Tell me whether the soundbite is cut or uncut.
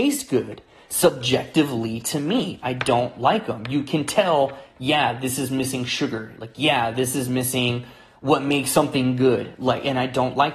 uncut